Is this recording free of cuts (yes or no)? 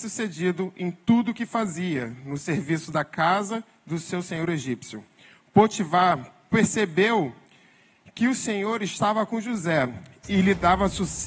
yes